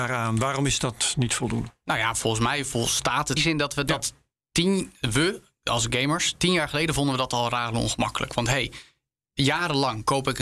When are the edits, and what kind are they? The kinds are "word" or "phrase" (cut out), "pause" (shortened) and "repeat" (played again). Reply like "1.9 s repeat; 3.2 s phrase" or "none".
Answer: 3.4 s phrase